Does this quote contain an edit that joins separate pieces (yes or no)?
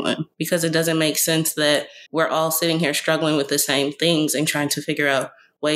yes